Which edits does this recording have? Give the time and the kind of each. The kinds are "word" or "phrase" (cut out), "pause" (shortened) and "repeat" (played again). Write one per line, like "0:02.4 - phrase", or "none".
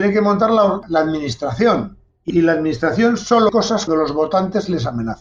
0:02.3 - word
0:03.5 - word
0:03.9 - word